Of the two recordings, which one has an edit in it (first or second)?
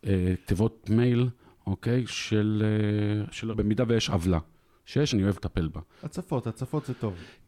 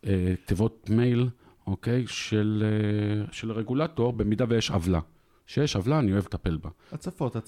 first